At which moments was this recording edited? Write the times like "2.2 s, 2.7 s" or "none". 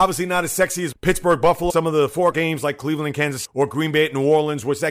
0.9 s, 1.7 s, 2.3 s, 3.4 s